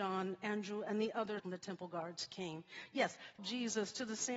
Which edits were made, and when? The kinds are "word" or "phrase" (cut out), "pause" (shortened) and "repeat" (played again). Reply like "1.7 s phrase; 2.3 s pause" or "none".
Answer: 1.4 s word; 3.4 s phrase